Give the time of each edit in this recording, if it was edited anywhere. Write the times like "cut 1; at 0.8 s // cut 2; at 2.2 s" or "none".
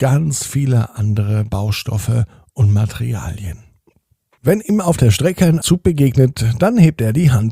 cut 1; at 5.6 s